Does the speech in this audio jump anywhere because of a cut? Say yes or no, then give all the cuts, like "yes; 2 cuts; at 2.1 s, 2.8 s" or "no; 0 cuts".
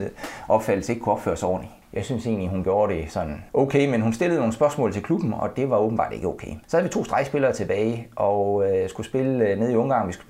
yes; 3 cuts; at 1.8 s, 3.5 s, 6.6 s